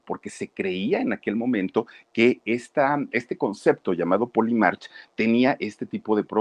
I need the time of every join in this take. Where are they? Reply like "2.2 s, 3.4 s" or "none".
none